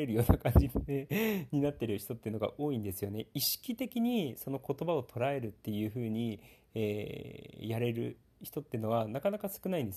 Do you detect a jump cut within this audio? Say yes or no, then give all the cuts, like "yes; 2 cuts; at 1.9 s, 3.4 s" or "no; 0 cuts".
no; 0 cuts